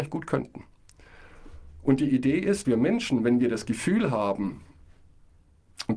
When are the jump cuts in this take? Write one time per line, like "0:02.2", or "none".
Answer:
0:02.6